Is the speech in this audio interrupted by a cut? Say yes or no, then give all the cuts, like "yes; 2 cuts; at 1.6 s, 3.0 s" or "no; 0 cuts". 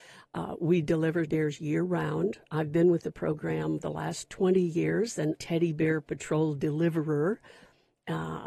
yes; 3 cuts; at 1.3 s, 3.8 s, 5.3 s